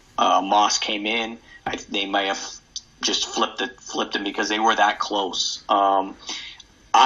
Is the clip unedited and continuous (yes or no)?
yes